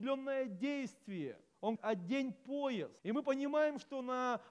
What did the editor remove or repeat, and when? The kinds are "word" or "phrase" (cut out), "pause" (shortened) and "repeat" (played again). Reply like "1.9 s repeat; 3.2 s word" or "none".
1.8 s word; 3.0 s pause